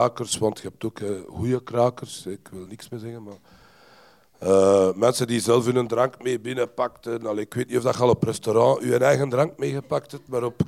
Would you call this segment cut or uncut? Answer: cut